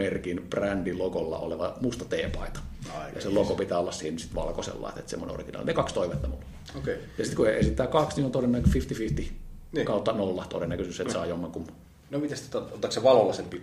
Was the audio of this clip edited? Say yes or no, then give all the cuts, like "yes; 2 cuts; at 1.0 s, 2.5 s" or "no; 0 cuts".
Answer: no; 0 cuts